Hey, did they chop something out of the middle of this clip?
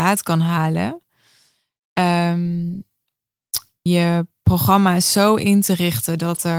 yes; 1 cut; at 3.9 s

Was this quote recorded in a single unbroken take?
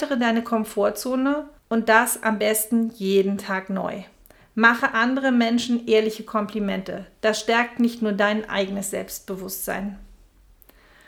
no; 1 cut; at 1.6 s

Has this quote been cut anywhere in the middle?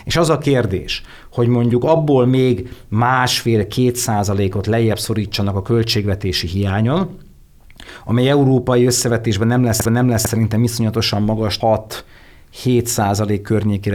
yes; 2 cuts; at 9.9 s, 11.6 s

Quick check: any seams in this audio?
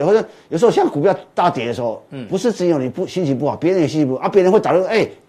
no; 0 cuts

